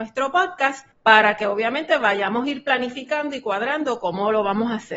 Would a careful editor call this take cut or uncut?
cut